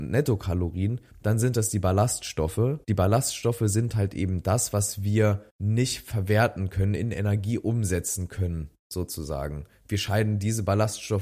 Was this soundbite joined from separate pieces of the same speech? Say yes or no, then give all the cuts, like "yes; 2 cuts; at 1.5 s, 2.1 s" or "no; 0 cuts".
yes; 2 cuts; at 2.8 s, 5.5 s